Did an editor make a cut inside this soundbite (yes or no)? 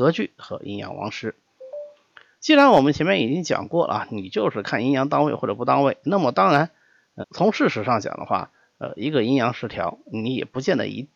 yes